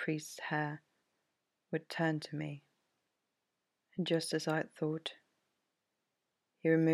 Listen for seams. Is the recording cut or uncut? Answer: uncut